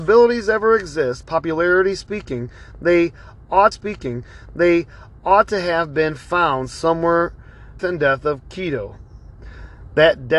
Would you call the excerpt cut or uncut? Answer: cut